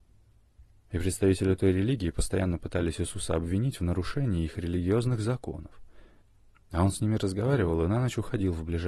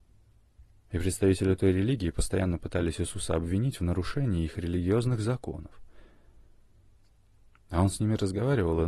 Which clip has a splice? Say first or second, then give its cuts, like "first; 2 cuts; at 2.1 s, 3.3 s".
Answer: first; 1 cut; at 6.2 s